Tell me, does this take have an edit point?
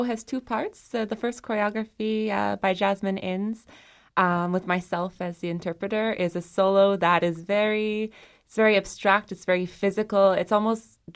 no; 0 cuts

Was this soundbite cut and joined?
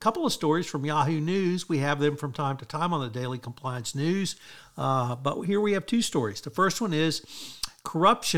no; 0 cuts

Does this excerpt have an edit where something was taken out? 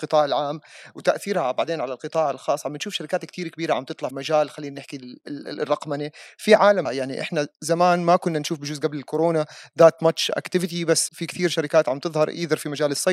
yes; 3 cuts; at 4.1 s, 6.8 s, 11.1 s

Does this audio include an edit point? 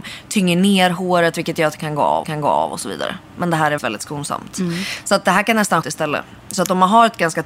yes; 3 cuts; at 2.2 s, 3.8 s, 5.8 s

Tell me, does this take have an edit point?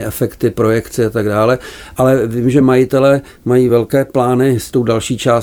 no; 0 cuts

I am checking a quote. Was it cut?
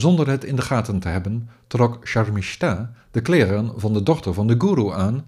no; 0 cuts

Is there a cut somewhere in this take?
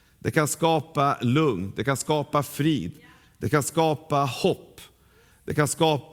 no; 0 cuts

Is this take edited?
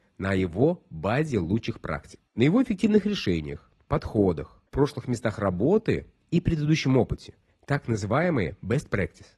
yes; 2 cuts; at 2.3 s, 4.7 s

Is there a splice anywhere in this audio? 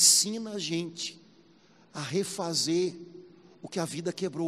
no; 0 cuts

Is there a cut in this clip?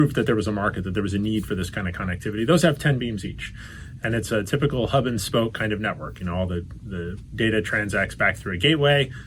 no; 0 cuts

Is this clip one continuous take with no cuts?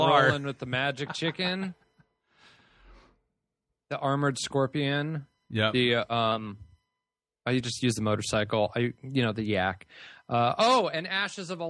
yes; 0 cuts

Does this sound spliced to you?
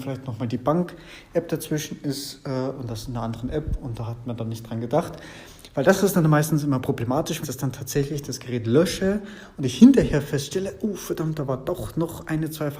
yes; 1 cut; at 7.4 s

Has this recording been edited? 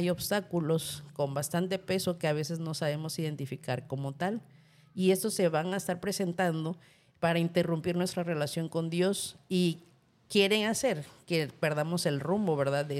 no; 0 cuts

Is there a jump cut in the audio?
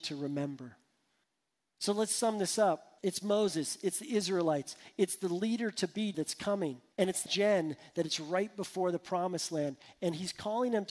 yes; 5 cuts; at 1.2 s, 3.0 s, 6.1 s, 6.9 s, 7.3 s

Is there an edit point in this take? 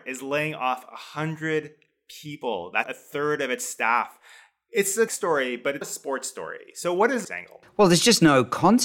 yes; 4 cuts; at 2.8 s, 5.1 s, 5.8 s, 7.2 s

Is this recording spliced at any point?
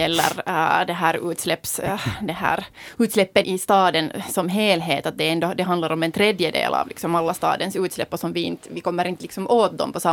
yes; 1 cut; at 3.4 s

